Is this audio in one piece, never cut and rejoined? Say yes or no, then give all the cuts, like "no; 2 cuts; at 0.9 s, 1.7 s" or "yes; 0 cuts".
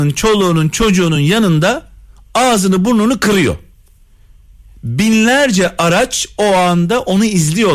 yes; 0 cuts